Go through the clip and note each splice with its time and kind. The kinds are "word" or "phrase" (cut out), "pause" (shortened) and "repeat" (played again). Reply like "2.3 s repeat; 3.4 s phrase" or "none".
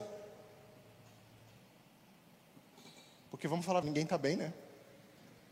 3.8 s word

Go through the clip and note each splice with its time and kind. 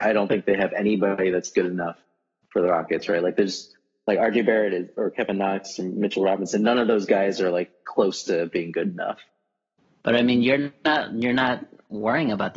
none

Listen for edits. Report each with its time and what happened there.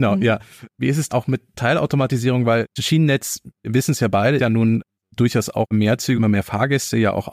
1.1 s word; 2.8 s word; 4.4 s word; 5.7 s word; 6.1 s word

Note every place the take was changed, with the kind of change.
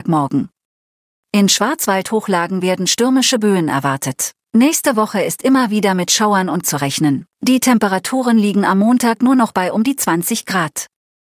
4.5 s pause; 6.6 s word; 7.3 s pause

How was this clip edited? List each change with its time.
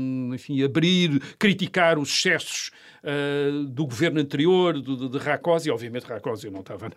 none

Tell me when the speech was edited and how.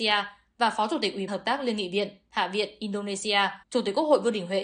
1.3 s word; 3.6 s pause

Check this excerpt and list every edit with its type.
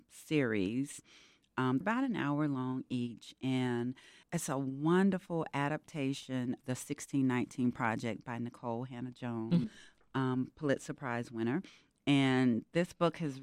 1.8 s word; 4.2 s word; 6.6 s word; 9.6 s word

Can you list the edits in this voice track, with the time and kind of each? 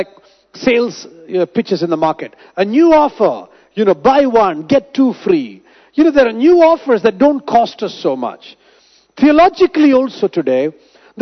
none

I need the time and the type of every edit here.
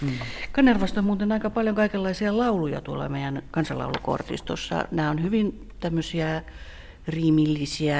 none

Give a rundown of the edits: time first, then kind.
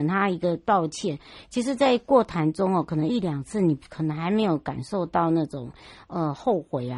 none

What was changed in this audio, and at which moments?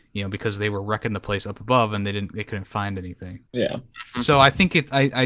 3.5 s pause

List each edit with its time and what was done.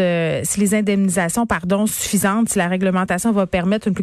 1.9 s word

